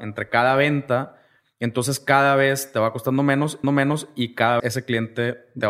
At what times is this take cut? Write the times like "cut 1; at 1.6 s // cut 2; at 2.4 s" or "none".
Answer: cut 1; at 3.6 s // cut 2; at 4.6 s